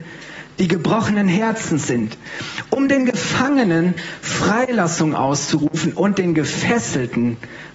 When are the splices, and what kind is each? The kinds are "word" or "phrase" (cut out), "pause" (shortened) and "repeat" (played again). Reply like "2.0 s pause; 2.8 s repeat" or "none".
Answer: none